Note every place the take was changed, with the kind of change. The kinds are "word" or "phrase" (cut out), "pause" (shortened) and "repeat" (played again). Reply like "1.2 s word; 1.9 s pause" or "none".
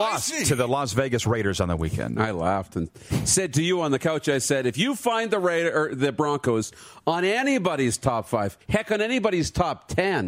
8.6 s pause

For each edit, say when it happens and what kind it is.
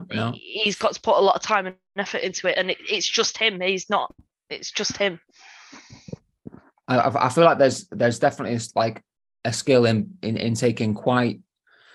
none

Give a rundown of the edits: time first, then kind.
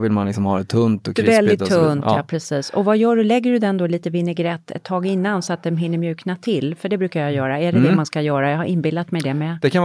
none

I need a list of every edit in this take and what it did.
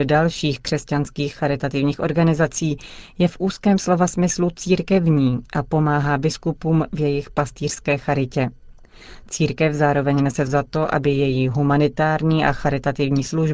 10.5 s word

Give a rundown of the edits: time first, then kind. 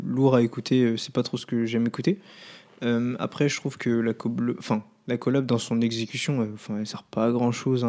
none

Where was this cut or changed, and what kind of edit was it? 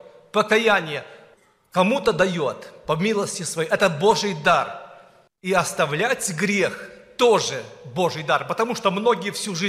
none

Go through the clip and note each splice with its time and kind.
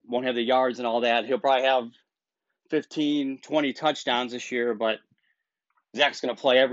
none

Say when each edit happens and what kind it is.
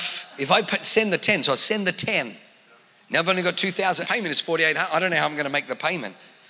4.0 s phrase

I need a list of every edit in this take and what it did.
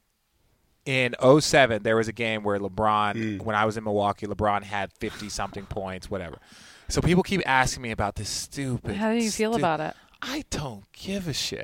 none

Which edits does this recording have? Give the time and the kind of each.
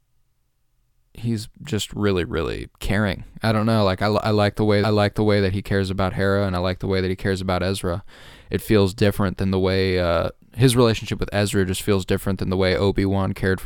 2.7 s pause; 4.8 s repeat

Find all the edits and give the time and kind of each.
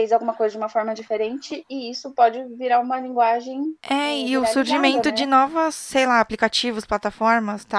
3.8 s pause

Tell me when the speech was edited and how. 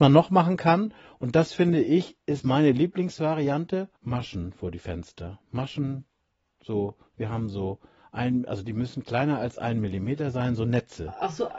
4.0 s pause

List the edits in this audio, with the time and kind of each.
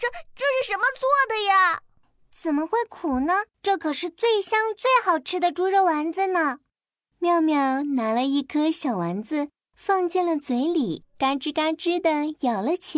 3.5 s pause; 11.1 s pause

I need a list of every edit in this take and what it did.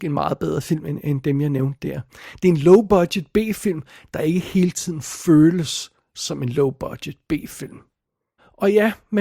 none

